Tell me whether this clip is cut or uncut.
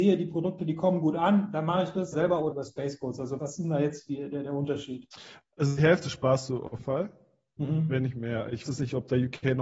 cut